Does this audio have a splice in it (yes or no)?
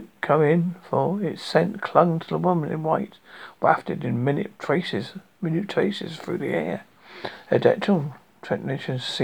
yes